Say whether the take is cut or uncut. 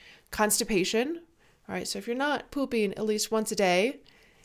uncut